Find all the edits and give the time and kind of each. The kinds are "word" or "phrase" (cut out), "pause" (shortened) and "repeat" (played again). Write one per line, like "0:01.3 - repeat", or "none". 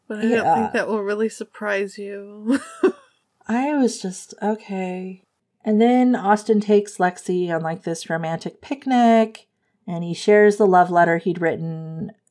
none